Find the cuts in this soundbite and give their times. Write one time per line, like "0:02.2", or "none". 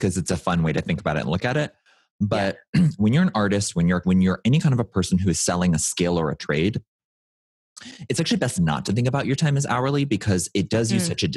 0:04.0